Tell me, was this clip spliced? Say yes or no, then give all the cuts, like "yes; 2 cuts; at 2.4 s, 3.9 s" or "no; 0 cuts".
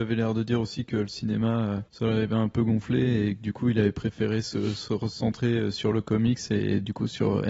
yes; 1 cut; at 1.9 s